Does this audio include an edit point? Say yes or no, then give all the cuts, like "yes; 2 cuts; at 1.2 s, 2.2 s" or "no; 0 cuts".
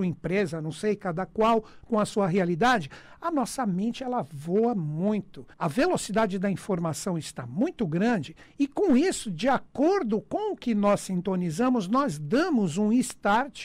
yes; 1 cut; at 5.5 s